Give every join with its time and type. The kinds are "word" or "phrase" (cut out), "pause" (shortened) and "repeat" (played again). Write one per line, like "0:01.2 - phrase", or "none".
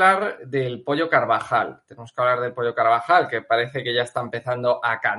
none